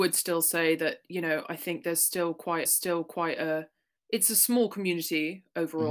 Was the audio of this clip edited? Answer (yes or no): yes